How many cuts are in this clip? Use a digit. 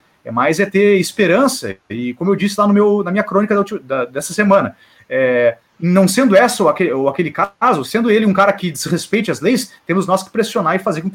2